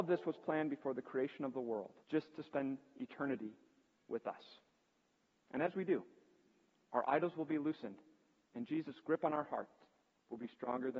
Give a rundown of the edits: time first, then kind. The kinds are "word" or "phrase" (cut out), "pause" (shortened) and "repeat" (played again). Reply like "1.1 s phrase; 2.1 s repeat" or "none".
2.0 s pause